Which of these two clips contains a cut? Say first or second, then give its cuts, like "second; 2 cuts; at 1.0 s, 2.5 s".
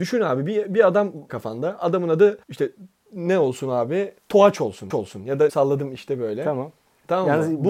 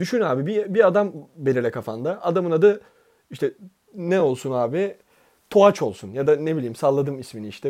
first; 6 cuts; at 1.3 s, 2.4 s, 4.2 s, 4.9 s, 5.5 s, 6.0 s